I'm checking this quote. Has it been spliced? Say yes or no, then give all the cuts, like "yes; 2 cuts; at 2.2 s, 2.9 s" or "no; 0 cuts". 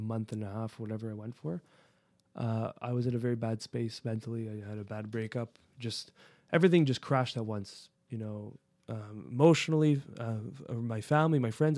no; 0 cuts